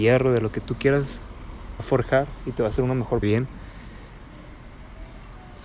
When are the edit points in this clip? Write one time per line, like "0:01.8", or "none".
0:01.8
0:03.2